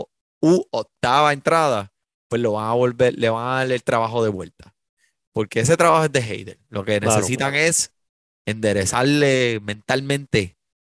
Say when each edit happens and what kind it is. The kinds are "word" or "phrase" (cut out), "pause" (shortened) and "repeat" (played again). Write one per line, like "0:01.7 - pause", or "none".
none